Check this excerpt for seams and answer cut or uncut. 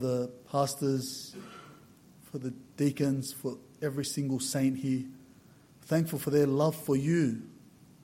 uncut